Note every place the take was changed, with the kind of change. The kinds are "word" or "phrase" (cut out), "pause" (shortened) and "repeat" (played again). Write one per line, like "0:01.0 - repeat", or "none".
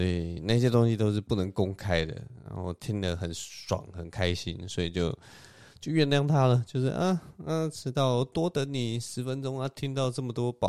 none